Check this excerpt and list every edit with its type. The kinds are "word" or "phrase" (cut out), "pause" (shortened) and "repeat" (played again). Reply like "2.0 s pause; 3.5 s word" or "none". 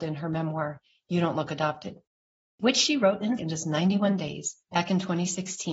3.4 s word; 4.6 s pause